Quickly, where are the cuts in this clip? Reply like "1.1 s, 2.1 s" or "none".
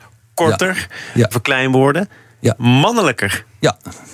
1.3 s, 2.6 s